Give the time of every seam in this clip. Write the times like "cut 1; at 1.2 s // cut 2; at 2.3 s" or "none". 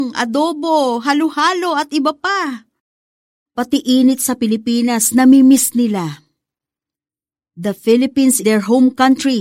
cut 1; at 8.4 s